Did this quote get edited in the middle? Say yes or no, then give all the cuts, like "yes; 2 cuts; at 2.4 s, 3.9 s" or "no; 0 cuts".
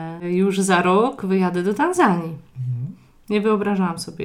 no; 0 cuts